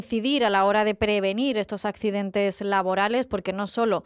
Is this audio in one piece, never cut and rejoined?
yes; 0 cuts

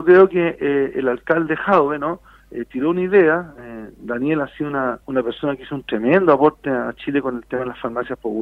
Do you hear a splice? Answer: yes; 1 cut; at 5.0 s

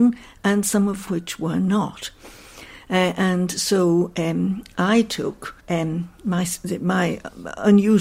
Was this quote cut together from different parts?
yes; 1 cut; at 5.6 s

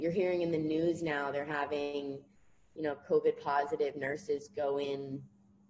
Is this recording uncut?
yes; 0 cuts

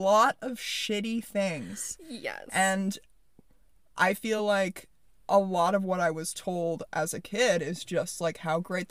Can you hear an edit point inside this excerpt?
no; 0 cuts

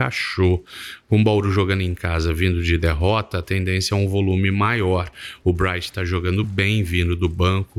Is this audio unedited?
yes; 0 cuts

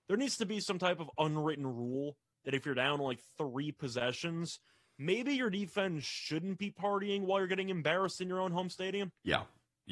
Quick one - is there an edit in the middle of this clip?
no; 0 cuts

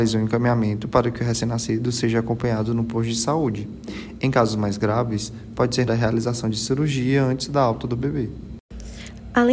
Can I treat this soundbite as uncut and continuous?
no; 1 cut; at 5.9 s

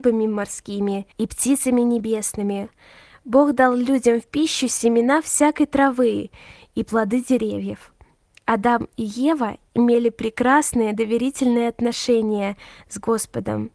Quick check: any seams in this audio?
yes; 1 cut; at 1.1 s

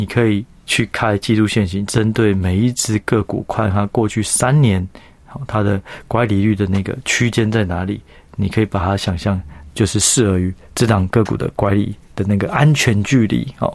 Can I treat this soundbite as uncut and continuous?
yes; 0 cuts

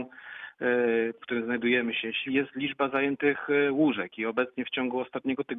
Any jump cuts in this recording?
yes; 2 cuts; at 1.2 s, 2.3 s

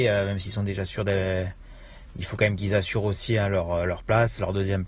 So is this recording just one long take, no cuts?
yes; 0 cuts

